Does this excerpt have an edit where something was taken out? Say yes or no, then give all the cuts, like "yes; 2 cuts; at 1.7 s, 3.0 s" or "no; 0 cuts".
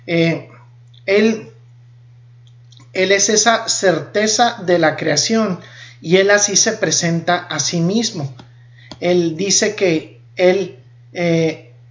yes; 1 cut; at 10.3 s